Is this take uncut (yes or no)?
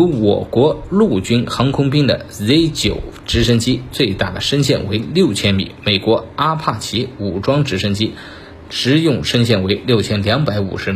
yes